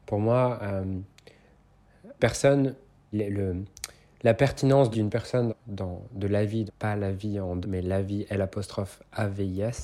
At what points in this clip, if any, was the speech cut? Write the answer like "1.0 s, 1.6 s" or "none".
2.2 s, 3.1 s, 4.9 s, 5.5 s, 6.7 s, 7.6 s